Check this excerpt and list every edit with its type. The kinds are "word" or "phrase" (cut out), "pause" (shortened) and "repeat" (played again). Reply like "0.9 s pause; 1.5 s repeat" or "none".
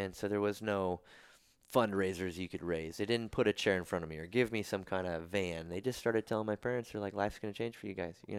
none